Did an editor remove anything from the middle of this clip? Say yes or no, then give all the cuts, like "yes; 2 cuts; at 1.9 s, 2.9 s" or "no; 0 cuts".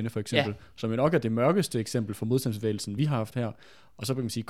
no; 0 cuts